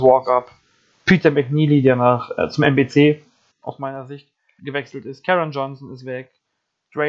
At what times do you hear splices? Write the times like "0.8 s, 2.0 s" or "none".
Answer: 3.5 s, 4.6 s